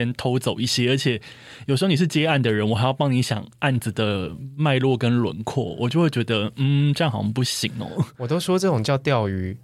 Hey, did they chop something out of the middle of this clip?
no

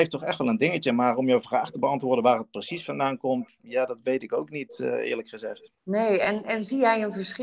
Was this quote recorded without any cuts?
no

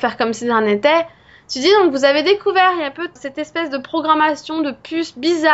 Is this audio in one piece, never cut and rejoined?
no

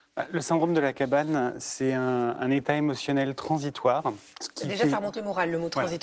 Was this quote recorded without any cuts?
no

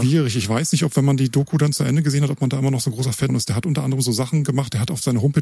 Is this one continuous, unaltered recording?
no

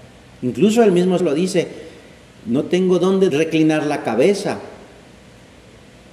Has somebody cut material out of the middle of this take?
yes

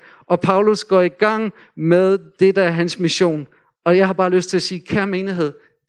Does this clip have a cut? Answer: no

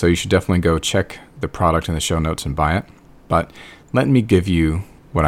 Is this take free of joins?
yes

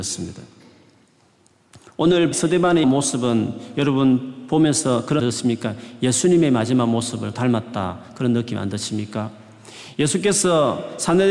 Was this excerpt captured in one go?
no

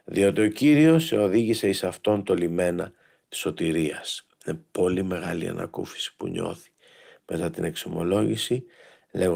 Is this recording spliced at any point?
no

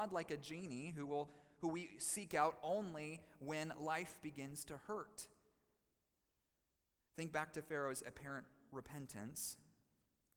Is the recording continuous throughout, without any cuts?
yes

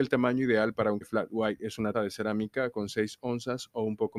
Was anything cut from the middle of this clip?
yes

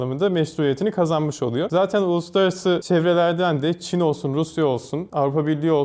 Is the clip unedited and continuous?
yes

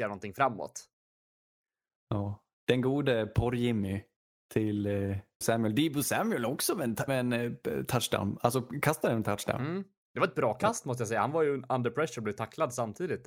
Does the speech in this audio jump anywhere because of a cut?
yes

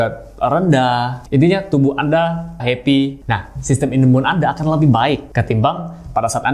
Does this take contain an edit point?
yes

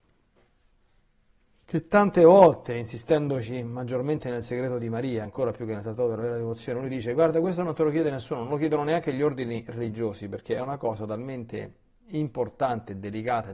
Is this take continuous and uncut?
yes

